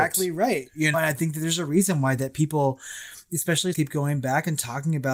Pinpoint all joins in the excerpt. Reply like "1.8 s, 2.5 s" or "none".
0.9 s, 3.7 s